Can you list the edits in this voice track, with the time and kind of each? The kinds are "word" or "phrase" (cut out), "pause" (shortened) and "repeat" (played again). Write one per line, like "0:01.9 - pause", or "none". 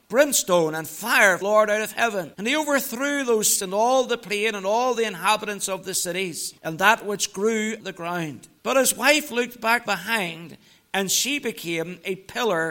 0:01.4 - phrase
0:02.3 - pause
0:03.5 - word
0:06.6 - pause
0:07.8 - word
0:08.6 - pause
0:09.9 - word